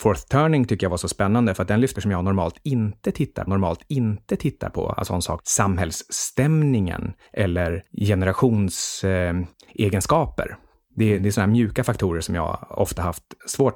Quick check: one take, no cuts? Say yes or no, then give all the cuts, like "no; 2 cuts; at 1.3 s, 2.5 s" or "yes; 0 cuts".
no; 4 cuts; at 2.0 s, 3.5 s, 5.1 s, 5.4 s